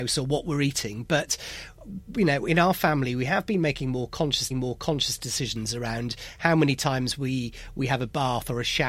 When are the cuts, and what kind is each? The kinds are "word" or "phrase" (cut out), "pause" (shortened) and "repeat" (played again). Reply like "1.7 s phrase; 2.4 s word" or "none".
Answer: 4.5 s repeat